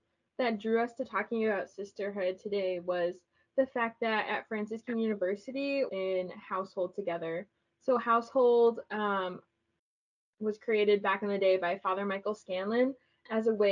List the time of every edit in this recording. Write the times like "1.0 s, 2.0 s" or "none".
5.9 s